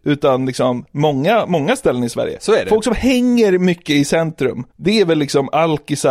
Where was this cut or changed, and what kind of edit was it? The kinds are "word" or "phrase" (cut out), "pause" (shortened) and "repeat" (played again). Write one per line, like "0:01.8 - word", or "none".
0:04.7 - pause